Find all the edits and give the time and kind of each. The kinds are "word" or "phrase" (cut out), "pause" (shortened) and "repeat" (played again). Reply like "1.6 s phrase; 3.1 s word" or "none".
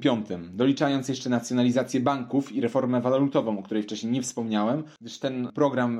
none